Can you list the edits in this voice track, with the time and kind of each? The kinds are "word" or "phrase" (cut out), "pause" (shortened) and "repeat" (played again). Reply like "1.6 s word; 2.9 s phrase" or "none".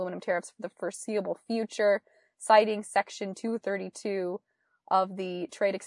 none

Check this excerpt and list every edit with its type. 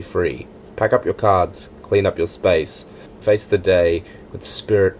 3.2 s word

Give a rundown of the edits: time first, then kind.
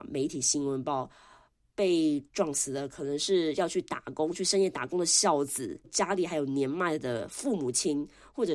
5.8 s word

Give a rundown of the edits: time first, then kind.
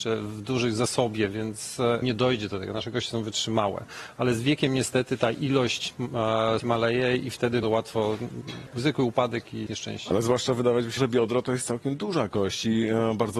2.0 s word; 6.6 s word; 7.6 s word; 8.7 s word; 9.7 s word; 11.0 s word

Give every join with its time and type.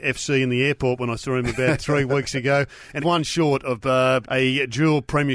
1.8 s word; 3.0 s word; 4.2 s word

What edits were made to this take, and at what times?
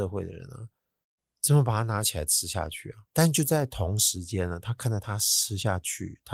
3.1 s pause

